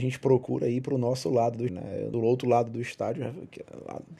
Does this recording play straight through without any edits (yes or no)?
no